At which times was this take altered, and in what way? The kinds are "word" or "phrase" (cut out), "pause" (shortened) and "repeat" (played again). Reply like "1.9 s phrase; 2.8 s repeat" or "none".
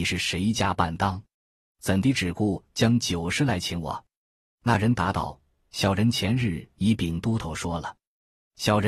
none